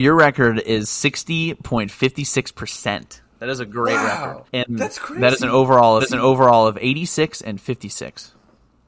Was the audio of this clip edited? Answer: yes; 3 cuts; at 3.3 s, 4.5 s, 6.0 s

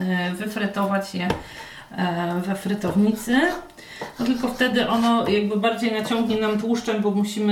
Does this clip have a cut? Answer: no; 0 cuts

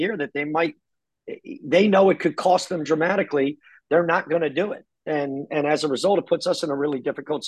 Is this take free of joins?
yes; 0 cuts

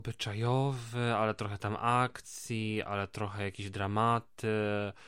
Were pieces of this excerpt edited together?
no; 0 cuts

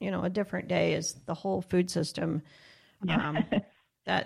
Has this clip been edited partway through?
no; 0 cuts

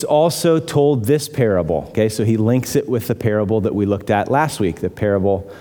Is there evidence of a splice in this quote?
no; 0 cuts

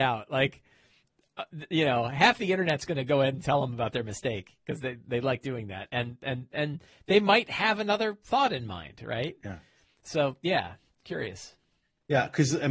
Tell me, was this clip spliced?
no; 0 cuts

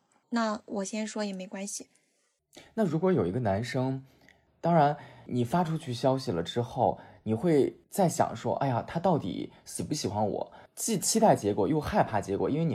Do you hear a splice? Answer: no; 0 cuts

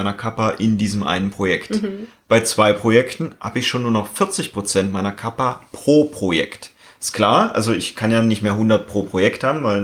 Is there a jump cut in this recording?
no; 0 cuts

